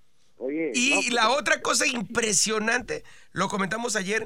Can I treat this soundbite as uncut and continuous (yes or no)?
yes